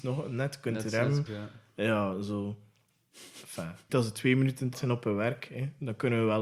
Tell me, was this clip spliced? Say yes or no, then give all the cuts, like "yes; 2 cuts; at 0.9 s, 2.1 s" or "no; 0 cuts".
yes; 3 cuts; at 1.3 s, 3.9 s, 4.7 s